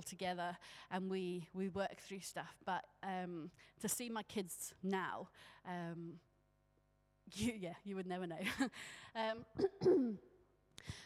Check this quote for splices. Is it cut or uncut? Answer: uncut